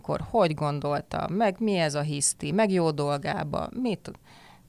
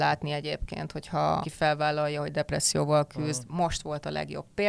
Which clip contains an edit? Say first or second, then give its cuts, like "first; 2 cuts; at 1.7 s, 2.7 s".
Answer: second; 1 cut; at 1.4 s